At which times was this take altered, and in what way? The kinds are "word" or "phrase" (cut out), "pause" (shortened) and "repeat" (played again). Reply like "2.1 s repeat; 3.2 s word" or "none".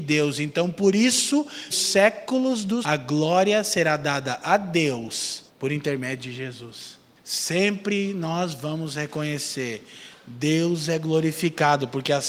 1.7 s word; 2.8 s word; 5.5 s pause; 7.2 s pause